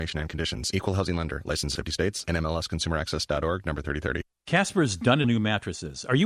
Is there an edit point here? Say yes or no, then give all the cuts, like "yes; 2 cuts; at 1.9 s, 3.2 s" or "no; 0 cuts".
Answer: yes; 2 cuts; at 1.8 s, 5.2 s